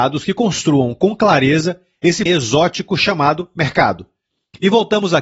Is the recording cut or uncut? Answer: cut